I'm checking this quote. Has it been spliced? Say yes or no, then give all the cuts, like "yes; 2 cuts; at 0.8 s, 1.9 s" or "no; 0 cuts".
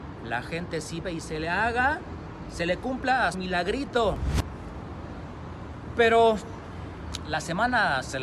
yes; 2 cuts; at 1.0 s, 3.3 s